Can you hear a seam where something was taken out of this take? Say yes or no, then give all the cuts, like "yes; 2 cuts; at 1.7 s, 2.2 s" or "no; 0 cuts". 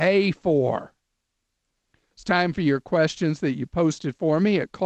no; 0 cuts